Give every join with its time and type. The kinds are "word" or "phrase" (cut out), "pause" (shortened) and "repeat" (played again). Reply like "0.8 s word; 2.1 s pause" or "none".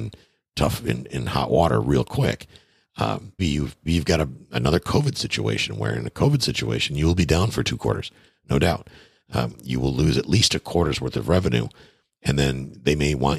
3.4 s word; 3.9 s word